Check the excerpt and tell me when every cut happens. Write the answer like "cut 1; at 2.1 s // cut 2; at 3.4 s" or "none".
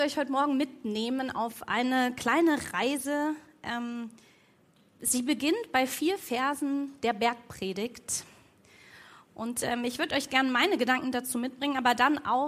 none